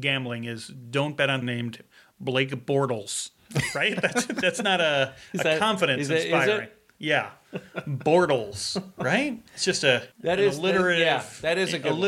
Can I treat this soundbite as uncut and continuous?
no; 3 cuts; at 1.4 s, 9.5 s, 10.1 s

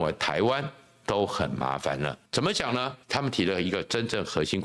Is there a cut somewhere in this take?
yes; 2 cuts; at 2.3 s, 3.0 s

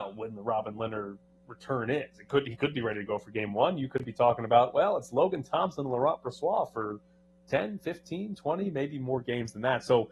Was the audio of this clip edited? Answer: no; 0 cuts

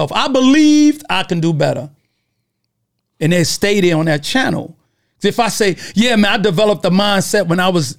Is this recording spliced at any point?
no; 0 cuts

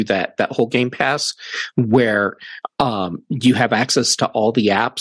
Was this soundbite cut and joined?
no; 0 cuts

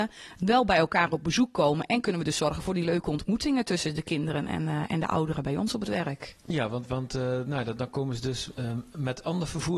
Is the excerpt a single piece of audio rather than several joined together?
yes; 0 cuts

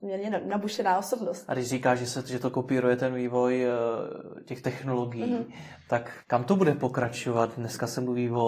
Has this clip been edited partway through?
yes; 1 cut; at 6.2 s

